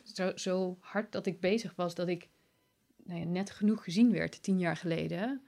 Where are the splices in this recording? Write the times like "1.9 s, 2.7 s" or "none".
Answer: none